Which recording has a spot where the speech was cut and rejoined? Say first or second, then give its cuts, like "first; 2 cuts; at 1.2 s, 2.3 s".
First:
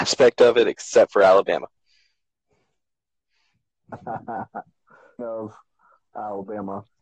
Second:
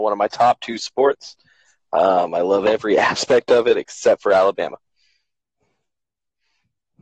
first; 1 cut; at 5.2 s